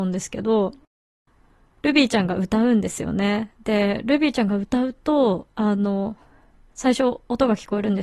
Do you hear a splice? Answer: yes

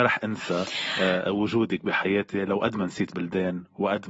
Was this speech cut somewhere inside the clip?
no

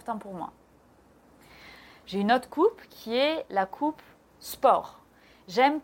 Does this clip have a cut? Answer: no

